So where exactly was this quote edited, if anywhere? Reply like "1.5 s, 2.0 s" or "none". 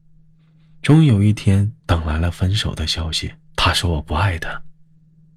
1.8 s, 3.4 s